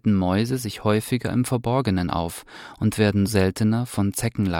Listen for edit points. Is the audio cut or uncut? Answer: cut